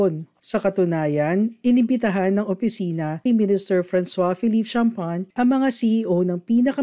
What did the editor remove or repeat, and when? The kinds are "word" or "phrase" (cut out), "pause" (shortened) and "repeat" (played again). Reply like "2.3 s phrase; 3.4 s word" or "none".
3.3 s phrase